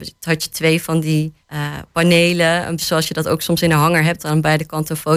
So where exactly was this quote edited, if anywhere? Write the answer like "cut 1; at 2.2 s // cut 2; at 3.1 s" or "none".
cut 1; at 1.4 s // cut 2; at 2.8 s // cut 3; at 4.2 s